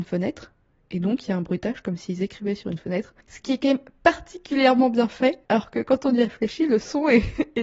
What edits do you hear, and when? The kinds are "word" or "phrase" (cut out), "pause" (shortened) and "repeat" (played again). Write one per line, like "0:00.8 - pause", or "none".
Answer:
0:03.2 - pause
0:05.4 - pause